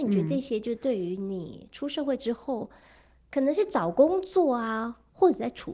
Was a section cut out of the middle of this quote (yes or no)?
no